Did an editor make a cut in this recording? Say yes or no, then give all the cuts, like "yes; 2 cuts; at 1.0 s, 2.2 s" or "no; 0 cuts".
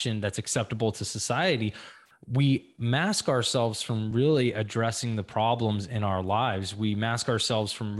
no; 0 cuts